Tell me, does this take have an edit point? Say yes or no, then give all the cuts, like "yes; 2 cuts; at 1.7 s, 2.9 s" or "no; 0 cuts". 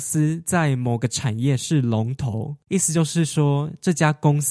yes; 1 cut; at 2.6 s